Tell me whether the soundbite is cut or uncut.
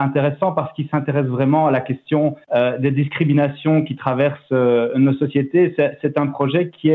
cut